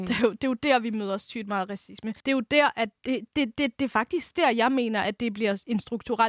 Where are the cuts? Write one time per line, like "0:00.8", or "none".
0:02.2